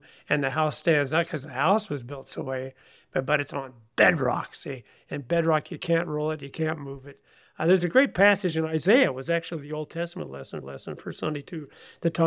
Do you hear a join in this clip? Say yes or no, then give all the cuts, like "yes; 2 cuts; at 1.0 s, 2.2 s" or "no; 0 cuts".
yes; 1 cut; at 10.6 s